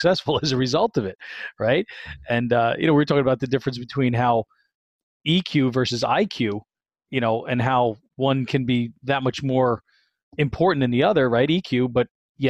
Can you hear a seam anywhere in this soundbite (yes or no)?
no